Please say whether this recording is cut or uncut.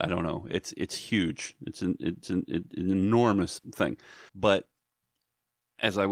cut